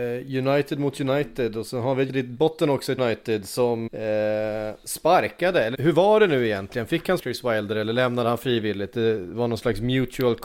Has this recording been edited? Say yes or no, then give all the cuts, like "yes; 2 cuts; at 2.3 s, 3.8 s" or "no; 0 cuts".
yes; 5 cuts; at 2.1 s, 3.0 s, 3.9 s, 5.7 s, 7.2 s